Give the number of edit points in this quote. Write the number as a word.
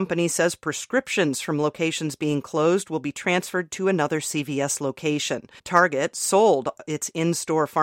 one